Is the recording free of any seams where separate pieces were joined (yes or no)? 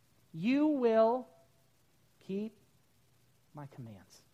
yes